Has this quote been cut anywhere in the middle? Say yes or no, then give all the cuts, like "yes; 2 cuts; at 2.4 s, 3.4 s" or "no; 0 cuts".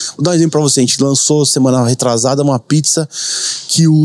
no; 0 cuts